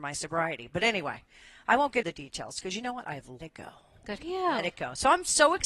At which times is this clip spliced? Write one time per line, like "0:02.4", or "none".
0:02.0
0:03.4
0:04.2